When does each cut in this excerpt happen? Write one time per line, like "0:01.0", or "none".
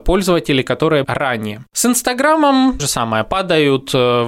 0:01.0
0:02.8